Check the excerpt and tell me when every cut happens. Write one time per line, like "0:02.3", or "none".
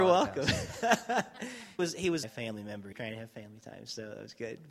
0:01.8
0:02.2
0:02.9